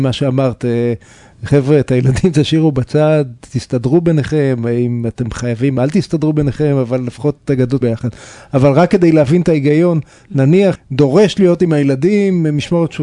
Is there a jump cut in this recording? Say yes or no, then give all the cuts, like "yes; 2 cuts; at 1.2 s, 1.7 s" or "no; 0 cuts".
yes; 2 cuts; at 7.8 s, 10.7 s